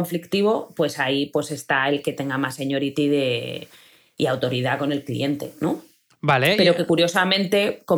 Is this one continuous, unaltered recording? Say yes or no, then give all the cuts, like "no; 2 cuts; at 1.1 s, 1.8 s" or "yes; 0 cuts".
yes; 0 cuts